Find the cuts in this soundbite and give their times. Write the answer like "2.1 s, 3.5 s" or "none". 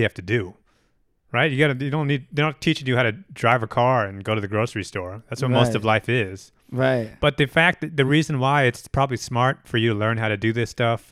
none